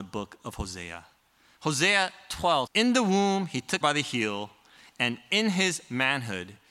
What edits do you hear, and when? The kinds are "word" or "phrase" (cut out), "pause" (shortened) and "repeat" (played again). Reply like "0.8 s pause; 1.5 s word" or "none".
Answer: 1.2 s pause; 2.7 s phrase; 3.8 s phrase